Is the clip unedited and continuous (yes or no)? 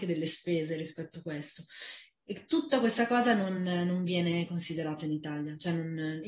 yes